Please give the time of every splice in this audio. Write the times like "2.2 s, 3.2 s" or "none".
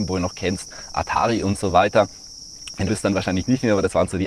2.9 s